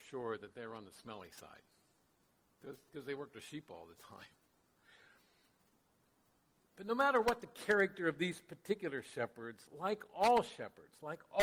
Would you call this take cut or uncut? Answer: uncut